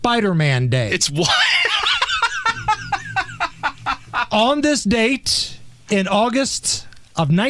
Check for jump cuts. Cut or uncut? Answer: uncut